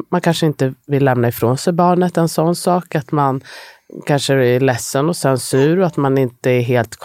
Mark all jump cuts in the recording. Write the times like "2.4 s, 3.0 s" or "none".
none